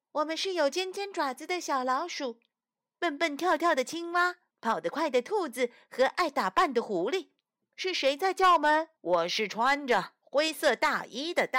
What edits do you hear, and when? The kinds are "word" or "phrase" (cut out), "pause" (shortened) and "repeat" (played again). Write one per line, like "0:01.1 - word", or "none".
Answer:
0:04.5 - pause
0:07.6 - pause
0:09.0 - pause